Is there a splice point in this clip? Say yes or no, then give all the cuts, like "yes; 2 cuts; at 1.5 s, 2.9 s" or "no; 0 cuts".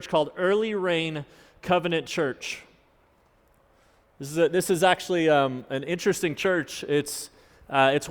no; 0 cuts